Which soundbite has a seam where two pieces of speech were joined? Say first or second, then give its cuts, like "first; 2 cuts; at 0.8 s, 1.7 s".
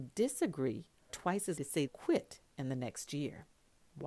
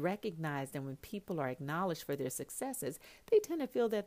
first; 3 cuts; at 1.1 s, 1.6 s, 1.9 s